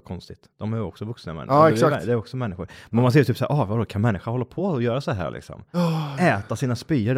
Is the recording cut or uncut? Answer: uncut